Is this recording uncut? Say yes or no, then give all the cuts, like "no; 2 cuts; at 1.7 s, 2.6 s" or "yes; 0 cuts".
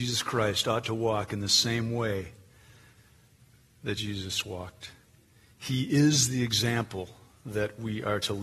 yes; 0 cuts